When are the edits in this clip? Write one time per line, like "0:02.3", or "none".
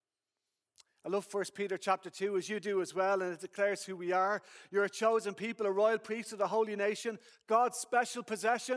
none